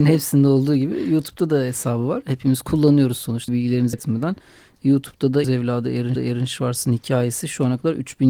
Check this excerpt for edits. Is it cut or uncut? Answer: cut